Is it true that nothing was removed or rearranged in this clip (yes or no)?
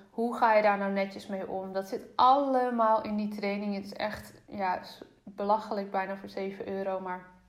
yes